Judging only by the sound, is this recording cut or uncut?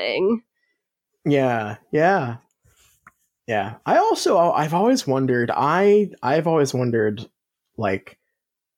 uncut